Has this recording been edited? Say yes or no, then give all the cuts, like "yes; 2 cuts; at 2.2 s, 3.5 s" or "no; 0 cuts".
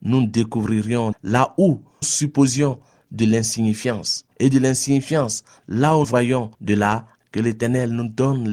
yes; 6 cuts; at 1.1 s, 2.0 s, 4.3 s, 6.0 s, 6.5 s, 7.2 s